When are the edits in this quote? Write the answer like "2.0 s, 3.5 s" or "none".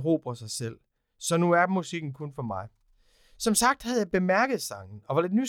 none